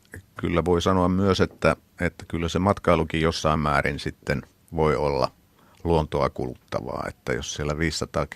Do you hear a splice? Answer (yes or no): no